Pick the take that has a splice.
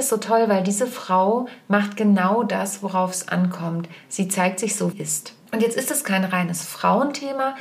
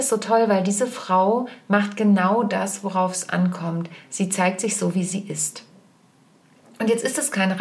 first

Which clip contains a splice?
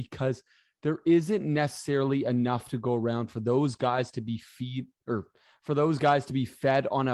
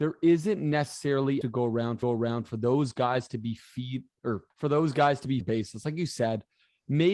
second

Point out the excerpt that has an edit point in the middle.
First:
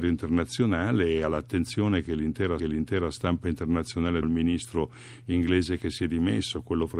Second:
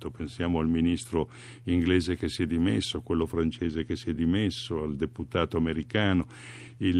first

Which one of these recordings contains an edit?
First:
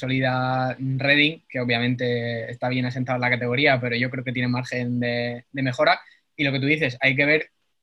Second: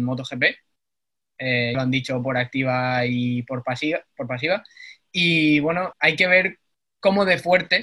second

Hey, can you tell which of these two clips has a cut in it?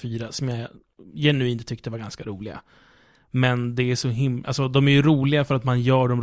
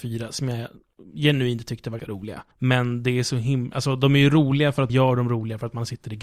second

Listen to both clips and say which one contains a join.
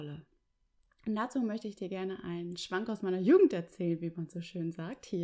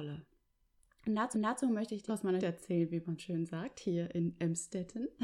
second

